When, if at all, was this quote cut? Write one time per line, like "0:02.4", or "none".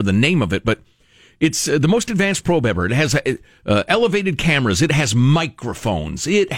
none

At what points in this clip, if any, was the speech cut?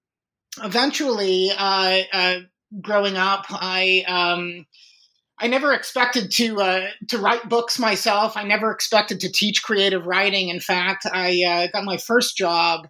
none

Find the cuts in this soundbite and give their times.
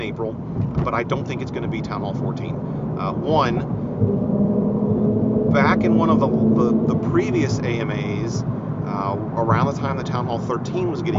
none

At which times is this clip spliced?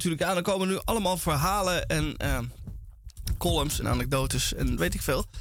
0:03.4
0:03.8

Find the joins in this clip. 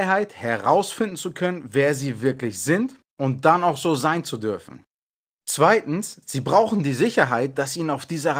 none

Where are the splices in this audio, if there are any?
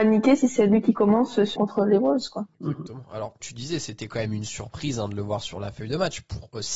0:01.5
0:02.5
0:03.4

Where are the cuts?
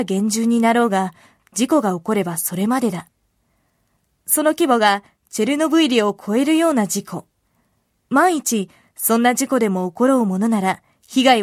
none

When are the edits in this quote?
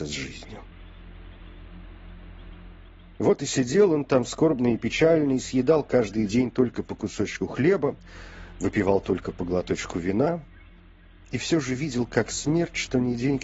none

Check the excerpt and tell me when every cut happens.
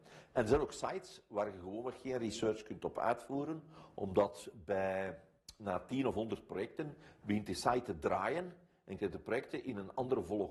0:09.0

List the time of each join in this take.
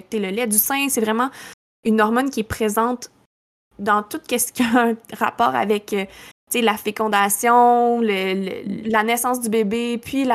0:08.8

